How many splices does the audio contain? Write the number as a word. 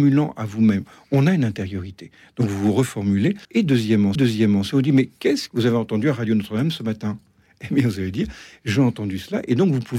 three